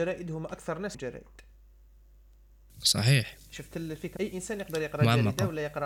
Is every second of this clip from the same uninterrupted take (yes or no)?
no